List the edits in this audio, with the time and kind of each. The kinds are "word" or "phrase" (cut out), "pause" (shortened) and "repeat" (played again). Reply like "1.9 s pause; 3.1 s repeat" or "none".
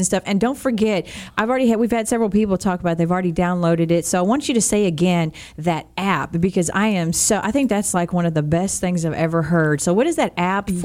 none